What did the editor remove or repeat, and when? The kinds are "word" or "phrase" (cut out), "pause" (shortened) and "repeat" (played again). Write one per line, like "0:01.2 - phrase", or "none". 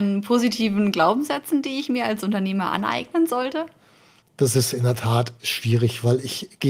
none